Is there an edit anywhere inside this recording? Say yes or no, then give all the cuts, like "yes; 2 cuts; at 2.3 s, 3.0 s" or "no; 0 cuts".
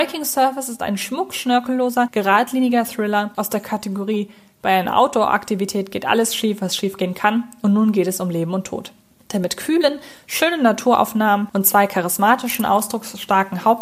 no; 0 cuts